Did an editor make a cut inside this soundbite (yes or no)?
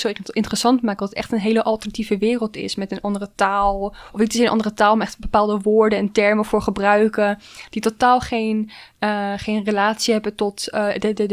no